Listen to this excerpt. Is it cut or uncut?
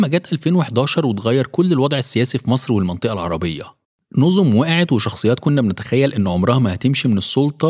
uncut